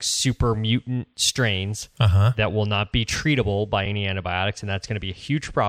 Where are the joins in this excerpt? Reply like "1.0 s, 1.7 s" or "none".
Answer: none